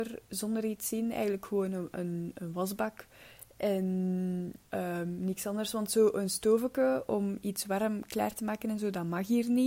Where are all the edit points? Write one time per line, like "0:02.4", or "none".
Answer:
0:04.7